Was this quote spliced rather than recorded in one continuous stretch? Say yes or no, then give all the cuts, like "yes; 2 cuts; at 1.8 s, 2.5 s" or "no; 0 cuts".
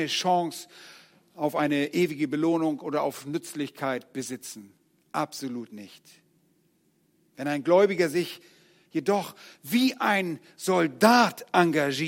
no; 0 cuts